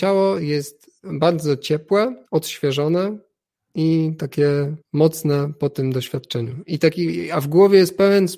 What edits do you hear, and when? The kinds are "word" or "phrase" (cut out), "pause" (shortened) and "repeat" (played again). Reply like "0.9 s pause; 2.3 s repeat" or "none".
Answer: 2.3 s pause; 4.8 s pause